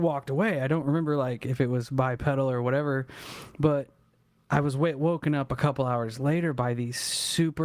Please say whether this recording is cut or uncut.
uncut